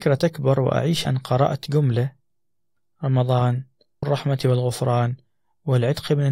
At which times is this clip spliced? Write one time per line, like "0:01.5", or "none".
0:01.1
0:04.0